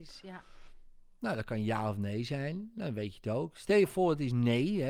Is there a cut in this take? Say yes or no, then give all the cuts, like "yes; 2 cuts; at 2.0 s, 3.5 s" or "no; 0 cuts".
no; 0 cuts